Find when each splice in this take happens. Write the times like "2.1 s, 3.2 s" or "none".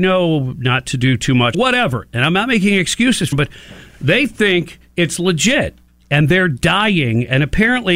1.5 s, 3.3 s